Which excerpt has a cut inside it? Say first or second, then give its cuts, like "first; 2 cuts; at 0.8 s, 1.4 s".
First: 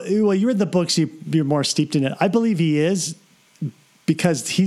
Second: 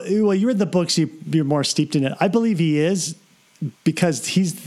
second; 1 cut; at 3.8 s